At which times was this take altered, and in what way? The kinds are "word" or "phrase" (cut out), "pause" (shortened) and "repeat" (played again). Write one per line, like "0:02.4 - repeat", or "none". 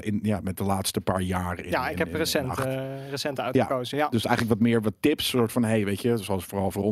none